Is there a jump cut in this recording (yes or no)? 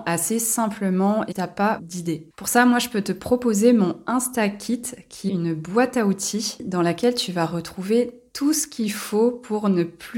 yes